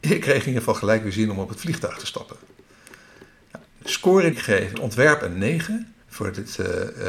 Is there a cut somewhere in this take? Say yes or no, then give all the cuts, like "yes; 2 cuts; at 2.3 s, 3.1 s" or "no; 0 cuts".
yes; 4 cuts; at 3.7 s, 4.3 s, 4.7 s, 6.0 s